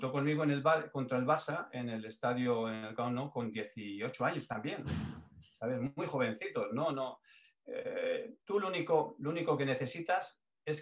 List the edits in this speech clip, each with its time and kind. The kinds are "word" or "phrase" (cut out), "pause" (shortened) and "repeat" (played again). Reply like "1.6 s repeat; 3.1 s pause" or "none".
8.4 s pause